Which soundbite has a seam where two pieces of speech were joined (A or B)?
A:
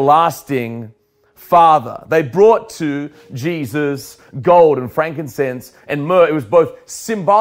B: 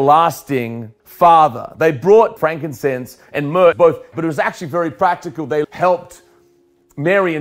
B